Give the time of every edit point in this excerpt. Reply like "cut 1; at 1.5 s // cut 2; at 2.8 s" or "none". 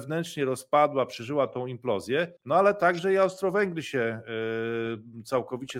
cut 1; at 2.4 s

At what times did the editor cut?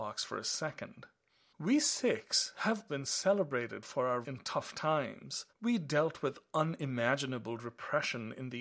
cut 1; at 2.9 s // cut 2; at 4.2 s // cut 3; at 5.5 s

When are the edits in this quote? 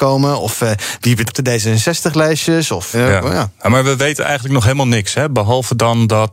cut 1; at 1.3 s // cut 2; at 2.9 s

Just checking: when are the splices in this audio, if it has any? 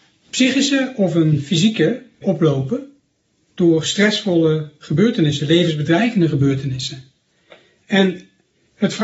cut 1; at 2.2 s

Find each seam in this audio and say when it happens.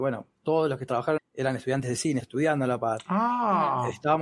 cut 1; at 1.2 s // cut 2; at 2.2 s

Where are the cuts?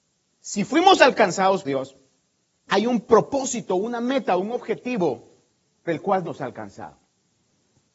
cut 1; at 1.6 s // cut 2; at 2.7 s // cut 3; at 5.9 s // cut 4; at 6.2 s

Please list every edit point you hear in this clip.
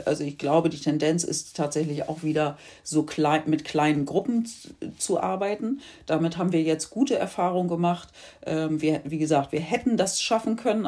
none

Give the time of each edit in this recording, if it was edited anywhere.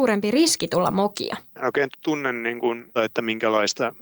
cut 1; at 1.9 s // cut 2; at 3.0 s

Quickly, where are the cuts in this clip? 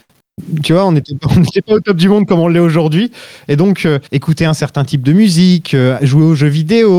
cut 1; at 4.1 s

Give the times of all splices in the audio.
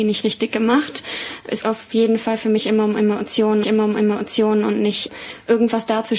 cut 1; at 1.6 s // cut 2; at 3.6 s

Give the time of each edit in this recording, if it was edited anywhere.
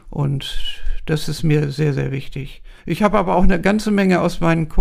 cut 1; at 2.8 s

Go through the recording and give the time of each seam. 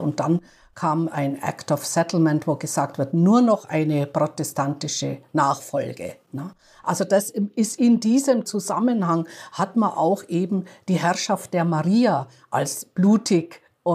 cut 1; at 6.2 s

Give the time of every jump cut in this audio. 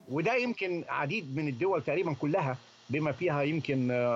none

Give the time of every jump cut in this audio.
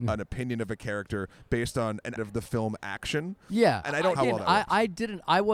cut 1; at 2.2 s // cut 2; at 3.8 s // cut 3; at 4.2 s

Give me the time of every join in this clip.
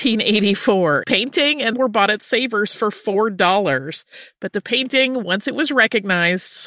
cut 1; at 1.0 s // cut 2; at 1.7 s

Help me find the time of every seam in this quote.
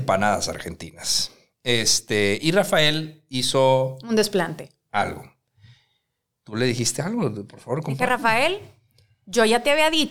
none

